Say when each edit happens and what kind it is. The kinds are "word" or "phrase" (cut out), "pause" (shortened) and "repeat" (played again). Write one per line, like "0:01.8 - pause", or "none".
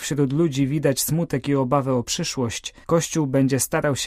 0:02.8 - pause

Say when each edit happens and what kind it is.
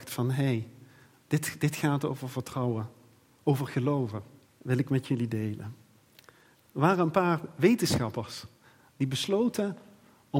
0:04.4 - pause

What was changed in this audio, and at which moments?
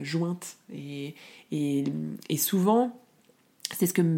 none

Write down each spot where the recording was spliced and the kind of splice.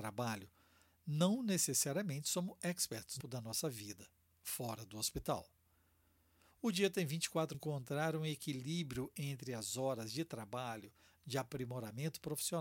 0:03.2 - phrase
0:07.5 - phrase

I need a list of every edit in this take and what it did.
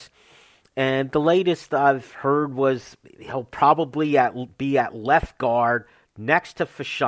none

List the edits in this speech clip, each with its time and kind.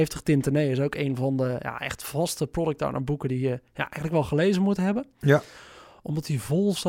none

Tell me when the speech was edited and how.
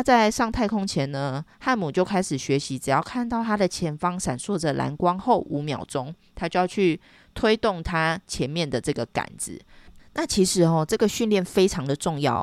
0:01.5 - pause

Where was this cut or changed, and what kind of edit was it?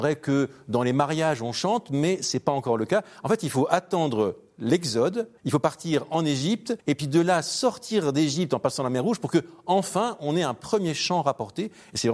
0:05.4 - pause
0:06.8 - pause

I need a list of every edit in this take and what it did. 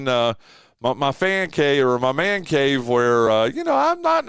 none

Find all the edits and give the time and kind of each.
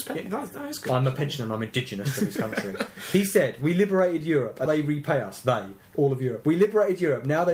0:04.7 - word

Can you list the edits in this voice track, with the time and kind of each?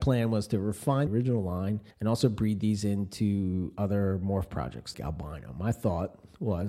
0:01.1 - phrase
0:01.9 - pause
0:04.9 - word

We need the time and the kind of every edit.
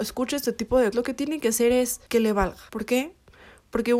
0:00.9 - word
0:02.1 - pause
0:02.7 - pause

